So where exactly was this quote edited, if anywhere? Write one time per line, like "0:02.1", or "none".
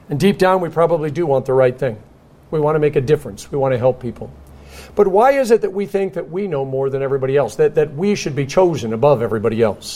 none